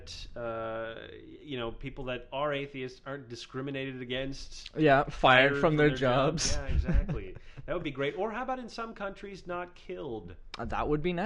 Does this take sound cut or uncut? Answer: uncut